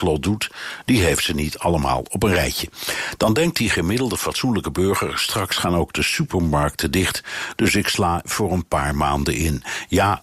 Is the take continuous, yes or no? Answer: no